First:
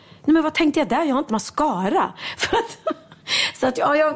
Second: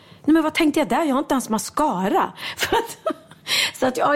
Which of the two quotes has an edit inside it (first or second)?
first